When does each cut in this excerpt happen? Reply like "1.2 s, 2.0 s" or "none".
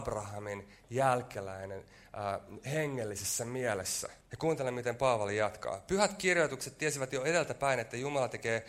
4.2 s